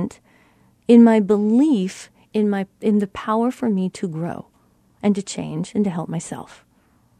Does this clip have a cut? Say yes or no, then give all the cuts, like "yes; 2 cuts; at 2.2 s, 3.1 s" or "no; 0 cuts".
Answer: no; 0 cuts